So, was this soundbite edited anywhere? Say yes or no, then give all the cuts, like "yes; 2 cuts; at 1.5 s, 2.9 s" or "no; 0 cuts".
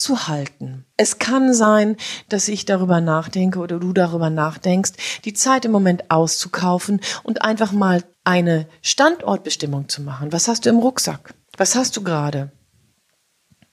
yes; 3 cuts; at 0.9 s, 8.1 s, 11.4 s